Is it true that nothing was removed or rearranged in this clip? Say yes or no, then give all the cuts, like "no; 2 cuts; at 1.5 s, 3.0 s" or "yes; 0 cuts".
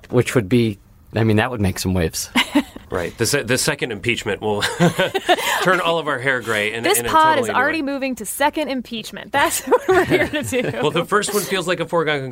no; 1 cut; at 2.8 s